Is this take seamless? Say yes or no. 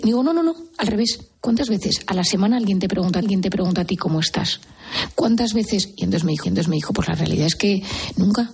no